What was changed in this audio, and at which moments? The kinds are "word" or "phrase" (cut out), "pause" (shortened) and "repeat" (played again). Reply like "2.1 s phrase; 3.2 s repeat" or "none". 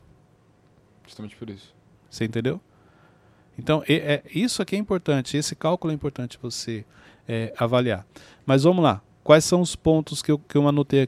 none